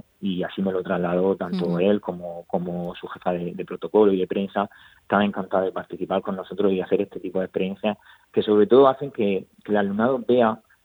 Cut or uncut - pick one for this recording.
uncut